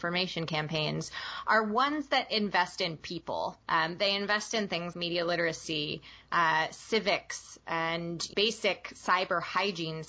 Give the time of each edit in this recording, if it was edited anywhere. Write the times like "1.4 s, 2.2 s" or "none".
3.6 s, 4.9 s, 8.3 s

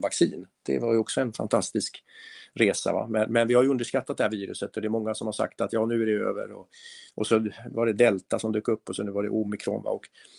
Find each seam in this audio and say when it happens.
7.1 s

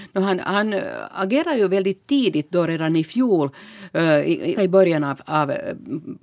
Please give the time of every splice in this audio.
4.6 s

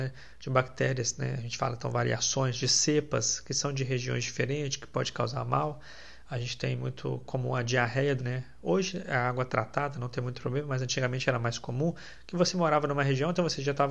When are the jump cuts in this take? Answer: 8.2 s

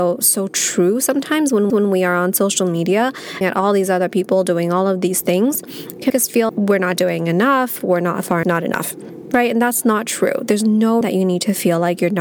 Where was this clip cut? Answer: 1.7 s, 3.4 s, 6.1 s, 6.5 s, 8.4 s, 11.0 s

